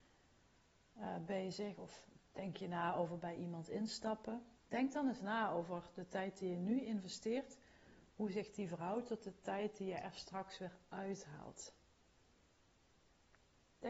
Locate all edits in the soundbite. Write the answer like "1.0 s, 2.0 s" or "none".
2.3 s, 4.6 s